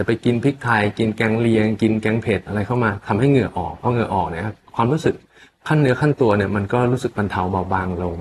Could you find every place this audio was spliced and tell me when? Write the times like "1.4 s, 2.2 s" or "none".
none